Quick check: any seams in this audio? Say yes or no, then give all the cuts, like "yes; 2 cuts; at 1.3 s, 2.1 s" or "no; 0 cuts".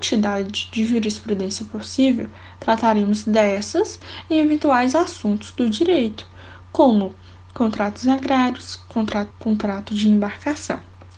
yes; 1 cut; at 9.3 s